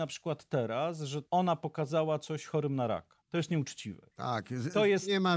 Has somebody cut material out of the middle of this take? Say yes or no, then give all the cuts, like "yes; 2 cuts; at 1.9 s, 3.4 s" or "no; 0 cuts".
yes; 3 cuts; at 1.3 s, 3.2 s, 4.1 s